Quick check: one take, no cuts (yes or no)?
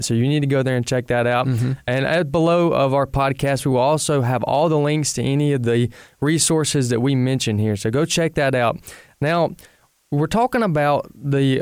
yes